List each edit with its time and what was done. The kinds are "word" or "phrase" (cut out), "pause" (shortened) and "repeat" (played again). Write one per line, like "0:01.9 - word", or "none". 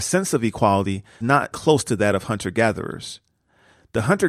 0:01.2 - word
0:01.5 - word